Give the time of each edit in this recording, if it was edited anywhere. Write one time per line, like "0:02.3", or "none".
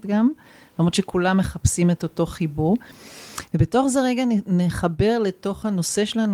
none

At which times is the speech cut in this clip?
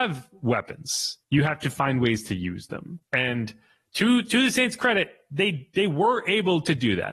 0:01.2
0:03.0

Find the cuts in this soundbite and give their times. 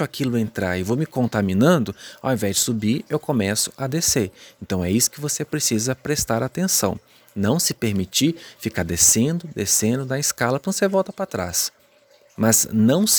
none

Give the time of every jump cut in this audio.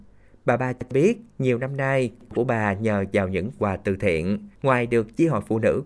0:02.3
0:03.6
0:04.5

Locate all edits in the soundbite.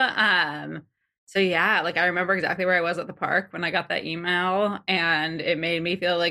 none

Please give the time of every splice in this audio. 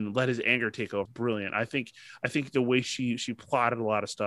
0:01.1

